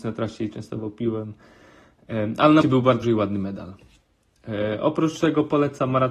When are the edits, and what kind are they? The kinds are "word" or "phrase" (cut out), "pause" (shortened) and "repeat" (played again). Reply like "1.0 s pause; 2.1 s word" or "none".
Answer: 2.6 s word; 3.0 s word